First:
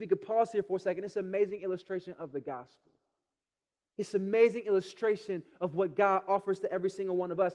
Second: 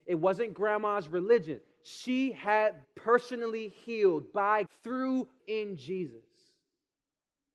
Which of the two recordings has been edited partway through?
second; 3 cuts; at 2.8 s, 4.6 s, 5.4 s

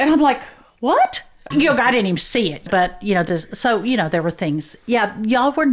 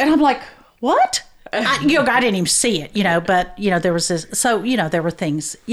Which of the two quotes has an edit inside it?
first; 3 cuts; at 1.5 s, 2.7 s, 3.3 s

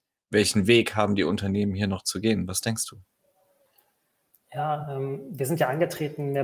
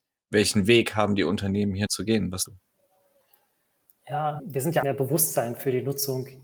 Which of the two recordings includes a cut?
second; 4 cuts; at 1.9 s, 2.5 s, 4.4 s, 4.8 s

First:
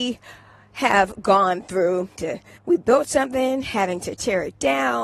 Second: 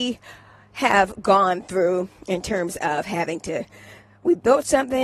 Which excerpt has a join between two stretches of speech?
first; 2 cuts; at 2.2 s, 2.6 s

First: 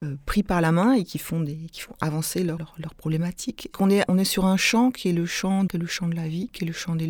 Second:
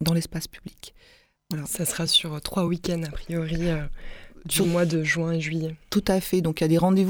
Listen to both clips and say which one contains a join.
first; 4 cuts; at 2.6 s, 3.7 s, 4.1 s, 5.7 s

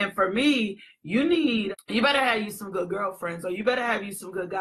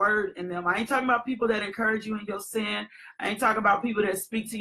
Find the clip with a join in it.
first; 1 cut; at 1.7 s

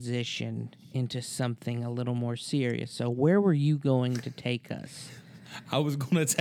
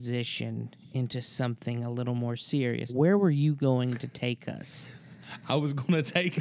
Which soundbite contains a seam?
second; 1 cut; at 2.9 s

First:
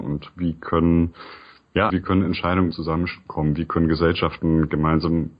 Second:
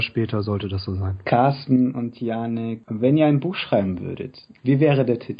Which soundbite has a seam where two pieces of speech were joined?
first; 2 cuts; at 1.9 s, 2.7 s

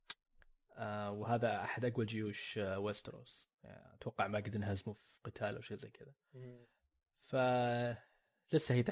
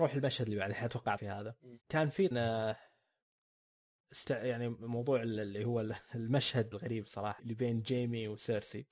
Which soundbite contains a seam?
second; 5 cuts; at 1.2 s, 1.8 s, 2.3 s, 6.7 s, 7.4 s

